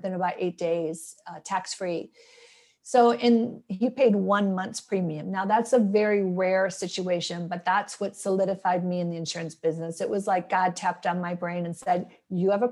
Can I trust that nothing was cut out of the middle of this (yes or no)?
yes